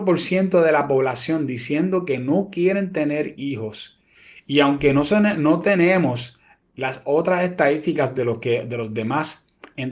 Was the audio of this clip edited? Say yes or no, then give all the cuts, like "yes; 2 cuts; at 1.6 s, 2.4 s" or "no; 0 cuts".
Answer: no; 0 cuts